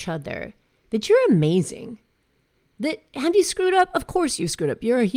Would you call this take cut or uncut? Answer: uncut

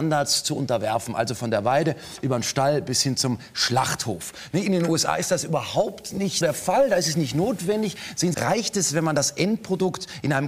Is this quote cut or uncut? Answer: cut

